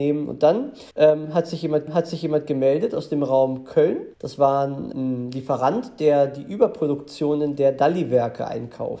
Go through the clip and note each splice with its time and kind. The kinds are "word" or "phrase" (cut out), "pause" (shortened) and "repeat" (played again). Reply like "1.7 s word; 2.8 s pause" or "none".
0.9 s pause; 1.9 s repeat; 4.1 s pause; 4.9 s word